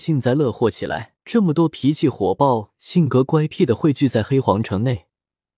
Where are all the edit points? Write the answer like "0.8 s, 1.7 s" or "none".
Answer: 1.2 s

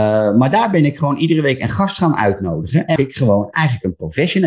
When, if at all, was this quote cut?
3.0 s

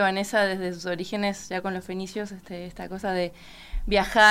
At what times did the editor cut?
none

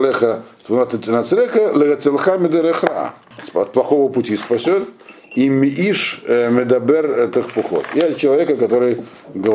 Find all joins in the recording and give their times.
none

